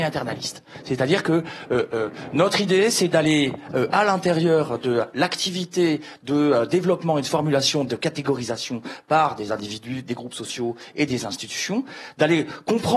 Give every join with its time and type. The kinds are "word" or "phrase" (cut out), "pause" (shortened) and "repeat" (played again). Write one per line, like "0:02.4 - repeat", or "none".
none